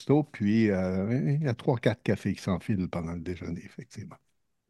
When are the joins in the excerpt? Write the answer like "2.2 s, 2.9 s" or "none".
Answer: none